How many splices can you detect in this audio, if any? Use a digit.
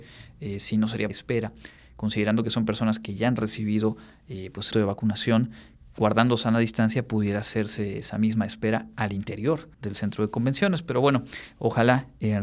3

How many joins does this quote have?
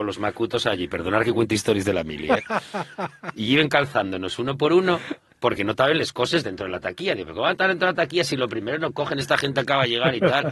0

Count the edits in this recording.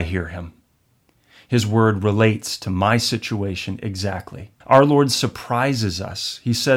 1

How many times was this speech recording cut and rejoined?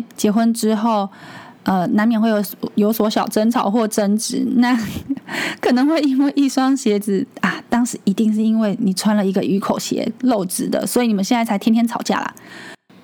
1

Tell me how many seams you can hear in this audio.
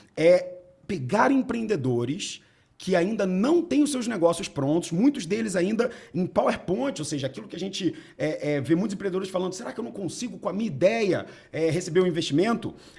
0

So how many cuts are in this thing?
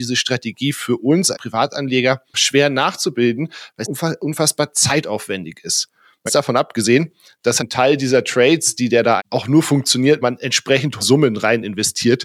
8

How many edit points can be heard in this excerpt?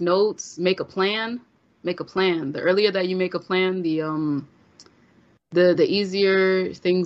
0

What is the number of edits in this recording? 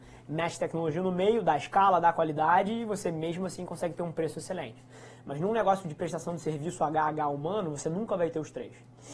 0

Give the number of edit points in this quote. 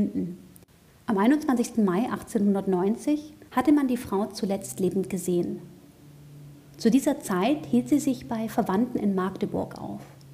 1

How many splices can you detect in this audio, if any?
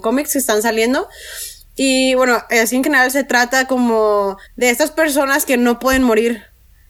1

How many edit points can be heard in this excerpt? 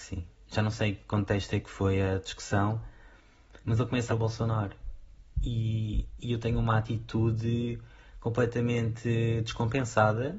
2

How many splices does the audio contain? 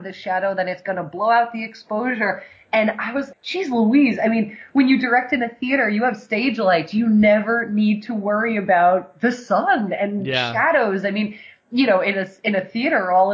1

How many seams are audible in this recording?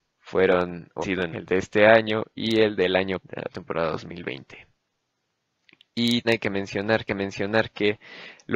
5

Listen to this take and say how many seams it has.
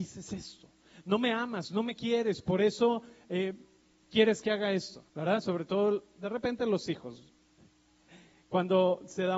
1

